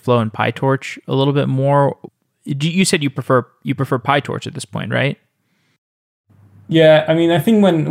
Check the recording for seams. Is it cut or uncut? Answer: uncut